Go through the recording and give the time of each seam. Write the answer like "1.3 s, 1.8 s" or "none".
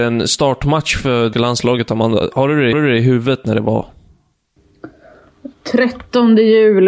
1.3 s, 2.7 s